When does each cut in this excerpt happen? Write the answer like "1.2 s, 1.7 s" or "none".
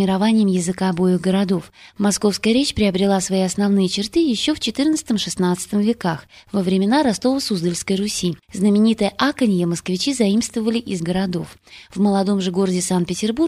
8.4 s, 11.0 s